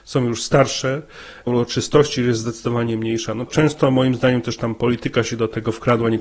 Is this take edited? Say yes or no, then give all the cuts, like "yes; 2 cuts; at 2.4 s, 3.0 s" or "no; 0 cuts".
yes; 2 cuts; at 1.5 s, 3.5 s